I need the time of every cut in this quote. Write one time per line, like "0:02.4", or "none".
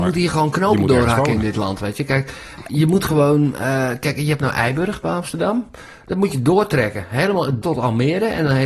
0:02.7
0:07.6